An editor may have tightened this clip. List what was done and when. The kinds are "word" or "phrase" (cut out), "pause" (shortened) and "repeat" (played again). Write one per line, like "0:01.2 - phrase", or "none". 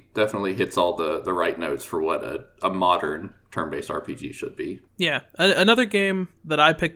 none

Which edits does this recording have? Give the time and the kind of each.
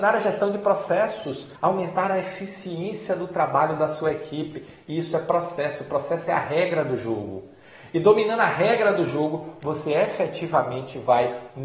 0:01.6 - pause

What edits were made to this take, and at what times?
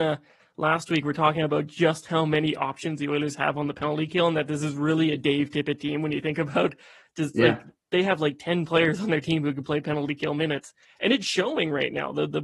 none

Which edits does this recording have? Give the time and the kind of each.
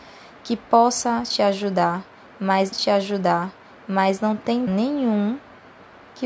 0:02.7 - repeat
0:04.7 - word

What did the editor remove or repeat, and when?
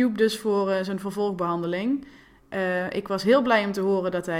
none

